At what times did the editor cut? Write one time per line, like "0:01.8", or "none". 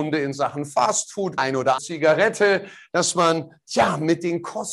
0:01.4
0:01.8